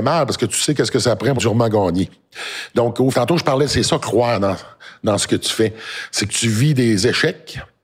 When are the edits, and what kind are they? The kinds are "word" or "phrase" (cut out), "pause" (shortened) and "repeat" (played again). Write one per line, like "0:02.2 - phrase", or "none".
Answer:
0:01.4 - phrase
0:03.1 - phrase

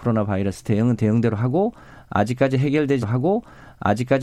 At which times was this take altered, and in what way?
0:03.0 - repeat

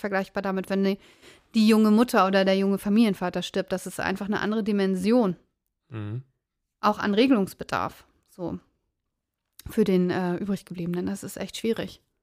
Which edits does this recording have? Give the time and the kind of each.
none

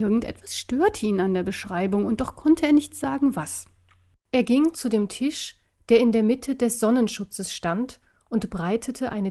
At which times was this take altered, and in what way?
none

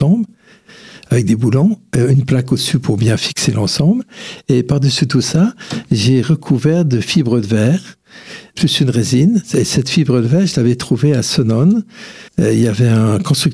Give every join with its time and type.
0:12.3 - pause

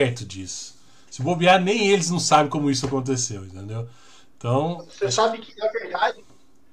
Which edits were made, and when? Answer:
none

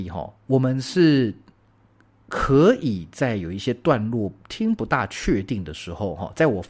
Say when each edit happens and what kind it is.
none

